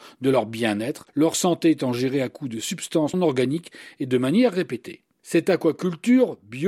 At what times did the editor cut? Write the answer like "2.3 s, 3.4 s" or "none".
1.1 s, 3.1 s